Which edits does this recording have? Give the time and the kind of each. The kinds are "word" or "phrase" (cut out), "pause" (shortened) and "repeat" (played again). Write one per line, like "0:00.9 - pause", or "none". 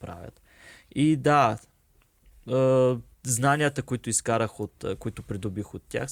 0:03.1 - pause